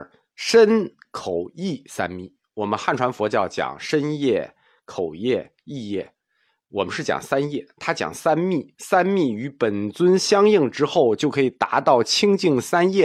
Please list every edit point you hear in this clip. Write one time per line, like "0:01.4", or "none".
none